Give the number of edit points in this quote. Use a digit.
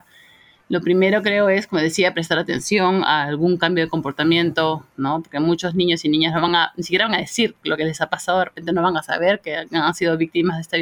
0